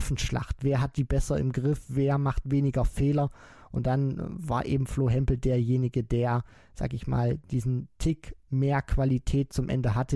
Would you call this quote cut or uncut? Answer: uncut